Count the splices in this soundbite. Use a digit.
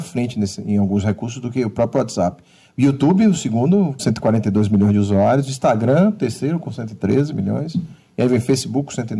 1